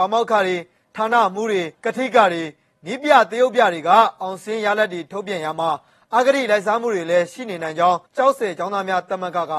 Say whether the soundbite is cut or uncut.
cut